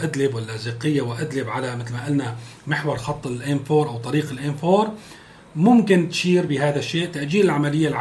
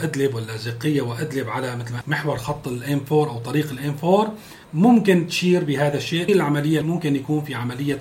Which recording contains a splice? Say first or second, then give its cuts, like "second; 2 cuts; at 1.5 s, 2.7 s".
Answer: second; 4 cuts; at 2.0 s, 4.6 s, 6.3 s, 6.8 s